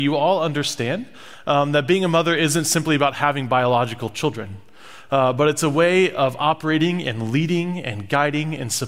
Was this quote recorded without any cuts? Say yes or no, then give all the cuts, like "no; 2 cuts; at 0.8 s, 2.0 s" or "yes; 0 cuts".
yes; 0 cuts